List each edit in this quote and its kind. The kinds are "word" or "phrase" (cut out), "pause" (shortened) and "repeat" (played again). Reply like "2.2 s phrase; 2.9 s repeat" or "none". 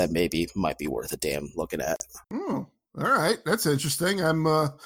2.2 s pause